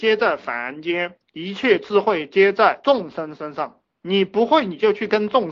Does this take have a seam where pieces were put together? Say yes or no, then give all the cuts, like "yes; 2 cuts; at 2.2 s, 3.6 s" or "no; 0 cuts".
yes; 2 cuts; at 1.3 s, 3.8 s